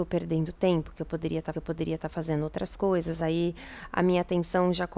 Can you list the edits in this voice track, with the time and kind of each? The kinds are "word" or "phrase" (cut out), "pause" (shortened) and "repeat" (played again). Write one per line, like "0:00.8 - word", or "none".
0:01.5 - repeat